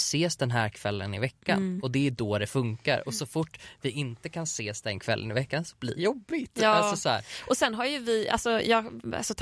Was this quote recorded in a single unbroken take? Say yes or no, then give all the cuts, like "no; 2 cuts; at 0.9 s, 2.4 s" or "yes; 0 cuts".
no; 1 cut; at 6.0 s